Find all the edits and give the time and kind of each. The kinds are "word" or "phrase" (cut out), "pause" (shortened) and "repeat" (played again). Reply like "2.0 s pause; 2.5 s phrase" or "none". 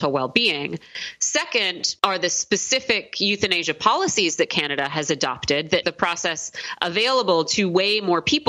2.0 s pause; 5.8 s word